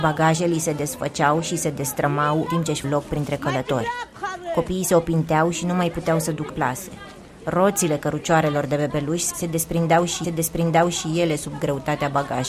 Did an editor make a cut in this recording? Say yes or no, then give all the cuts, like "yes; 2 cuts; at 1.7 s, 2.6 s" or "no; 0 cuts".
yes; 4 cuts; at 2.5 s, 2.8 s, 6.5 s, 10.2 s